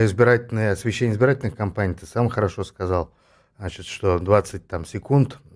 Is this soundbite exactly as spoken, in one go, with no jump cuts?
yes; 0 cuts

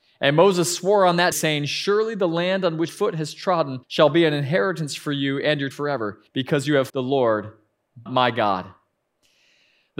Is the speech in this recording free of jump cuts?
no; 7 cuts; at 1.3 s, 2.9 s, 3.8 s, 5.7 s, 6.3 s, 6.9 s, 8.1 s

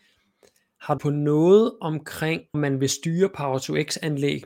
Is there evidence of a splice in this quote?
yes; 2 cuts; at 1.0 s, 2.5 s

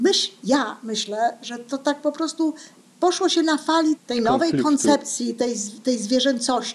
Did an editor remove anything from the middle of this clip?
yes; 1 cut; at 4.0 s

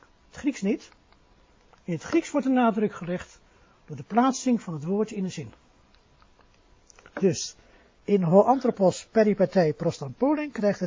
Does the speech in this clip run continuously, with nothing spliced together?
yes; 0 cuts

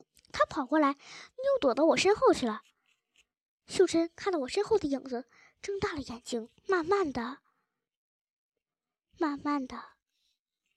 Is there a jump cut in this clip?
yes; 1 cut; at 6.6 s

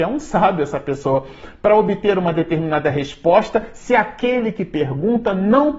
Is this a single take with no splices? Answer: yes; 0 cuts

